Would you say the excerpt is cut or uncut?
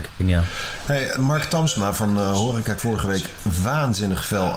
cut